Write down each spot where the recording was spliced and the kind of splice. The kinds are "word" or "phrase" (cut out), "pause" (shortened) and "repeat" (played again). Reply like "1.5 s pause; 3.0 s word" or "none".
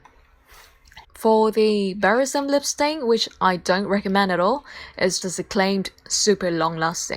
1.0 s pause; 5.2 s word